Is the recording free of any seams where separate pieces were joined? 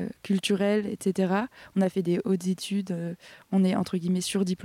yes; 0 cuts

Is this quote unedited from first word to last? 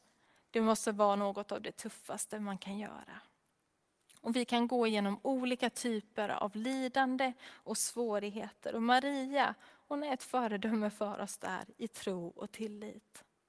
yes; 0 cuts

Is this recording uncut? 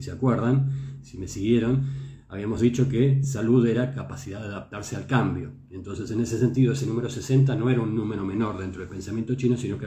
yes; 0 cuts

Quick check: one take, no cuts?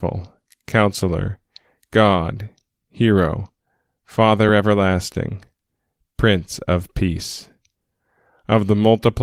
yes; 0 cuts

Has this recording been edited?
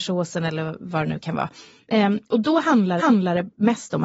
yes; 1 cut; at 3.0 s

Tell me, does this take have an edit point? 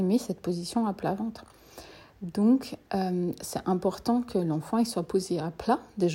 no; 0 cuts

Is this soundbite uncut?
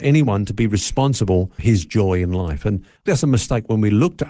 no; 2 cuts; at 1.6 s, 3.1 s

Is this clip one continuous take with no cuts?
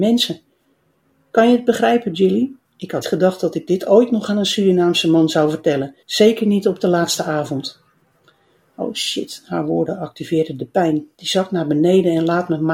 no; 4 cuts; at 2.6 s, 3.0 s, 6.0 s, 11.1 s

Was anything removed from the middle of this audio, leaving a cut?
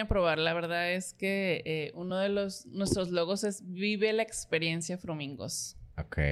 no; 0 cuts

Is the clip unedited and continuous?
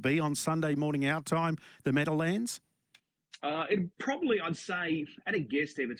no; 1 cut; at 3.9 s

